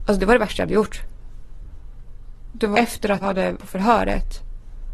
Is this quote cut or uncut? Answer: cut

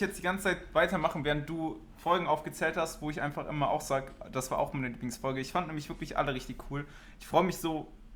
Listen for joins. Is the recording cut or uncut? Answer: uncut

